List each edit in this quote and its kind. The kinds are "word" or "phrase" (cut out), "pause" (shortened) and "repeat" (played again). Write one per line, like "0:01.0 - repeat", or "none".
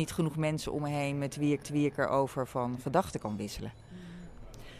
0:01.6 - repeat